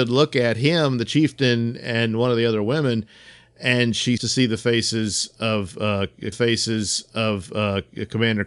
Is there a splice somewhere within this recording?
yes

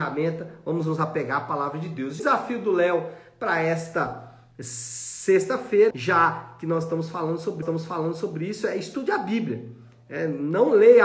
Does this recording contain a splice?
yes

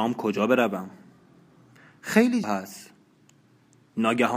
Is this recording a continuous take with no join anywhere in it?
no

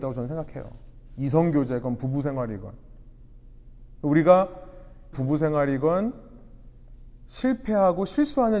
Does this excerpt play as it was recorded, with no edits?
no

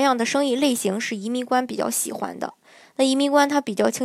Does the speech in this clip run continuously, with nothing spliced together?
yes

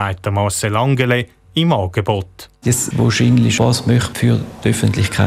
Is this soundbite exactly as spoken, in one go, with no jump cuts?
no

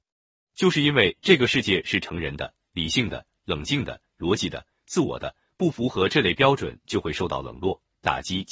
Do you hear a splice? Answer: no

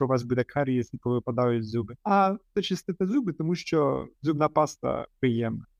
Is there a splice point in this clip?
yes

